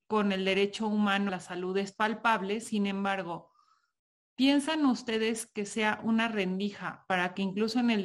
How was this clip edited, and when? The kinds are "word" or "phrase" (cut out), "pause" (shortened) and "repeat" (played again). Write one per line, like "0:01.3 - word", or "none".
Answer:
0:01.3 - word